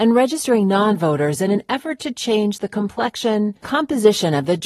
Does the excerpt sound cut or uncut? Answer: cut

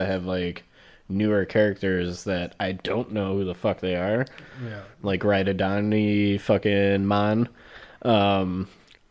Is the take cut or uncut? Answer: uncut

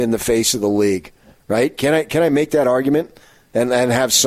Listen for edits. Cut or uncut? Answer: uncut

